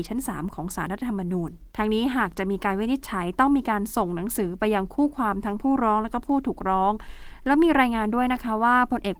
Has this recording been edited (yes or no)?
yes